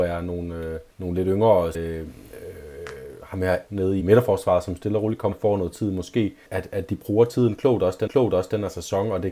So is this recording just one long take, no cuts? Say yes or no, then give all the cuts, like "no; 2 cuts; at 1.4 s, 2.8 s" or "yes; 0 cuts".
no; 7 cuts; at 0.9 s, 1.7 s, 3.7 s, 4.0 s, 5.3 s, 6.5 s, 8.1 s